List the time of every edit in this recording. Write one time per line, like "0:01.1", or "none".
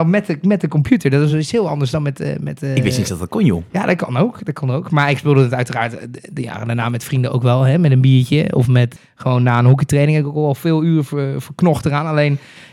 none